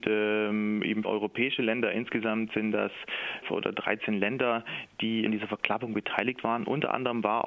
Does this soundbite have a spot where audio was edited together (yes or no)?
yes